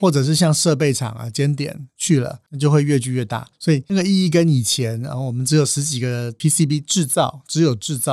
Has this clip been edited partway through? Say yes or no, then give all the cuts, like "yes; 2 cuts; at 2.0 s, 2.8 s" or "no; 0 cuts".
no; 0 cuts